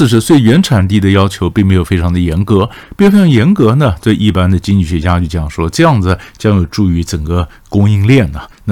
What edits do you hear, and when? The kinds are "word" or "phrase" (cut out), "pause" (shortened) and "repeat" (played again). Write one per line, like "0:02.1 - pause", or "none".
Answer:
none